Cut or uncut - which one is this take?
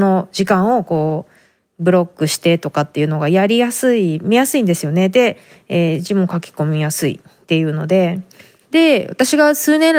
uncut